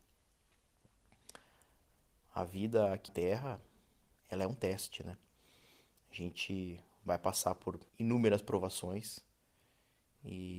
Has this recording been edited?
yes; 3 cuts; at 3.1 s, 4.2 s, 7.9 s

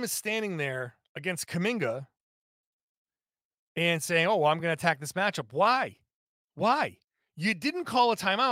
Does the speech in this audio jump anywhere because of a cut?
no; 0 cuts

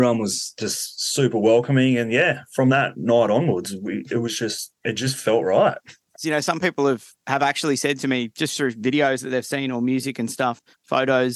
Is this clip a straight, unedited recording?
no; 1 cut; at 4.8 s

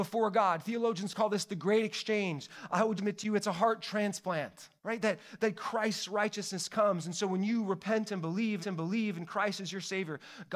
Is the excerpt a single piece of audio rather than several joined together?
no; 3 cuts; at 3.0 s, 4.8 s, 8.6 s

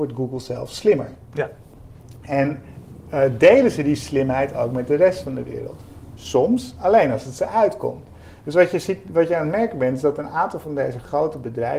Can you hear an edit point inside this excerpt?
no; 0 cuts

